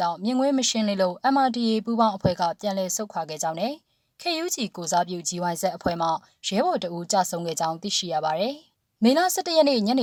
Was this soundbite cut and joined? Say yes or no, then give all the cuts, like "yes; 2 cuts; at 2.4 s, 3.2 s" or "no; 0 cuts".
no; 0 cuts